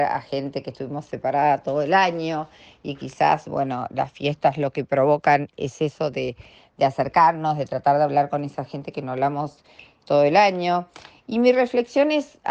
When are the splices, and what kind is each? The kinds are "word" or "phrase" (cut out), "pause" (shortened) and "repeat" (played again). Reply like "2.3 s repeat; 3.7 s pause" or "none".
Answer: none

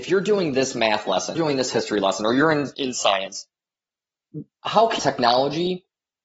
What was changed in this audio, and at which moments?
1.4 s phrase; 5.0 s phrase

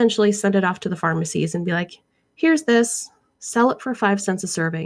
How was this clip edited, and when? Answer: none

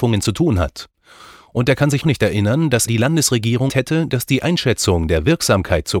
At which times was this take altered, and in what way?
2.0 s word; 2.9 s word; 3.7 s word

